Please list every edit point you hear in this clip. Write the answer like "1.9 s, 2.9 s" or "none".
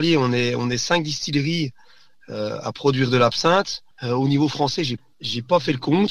3.9 s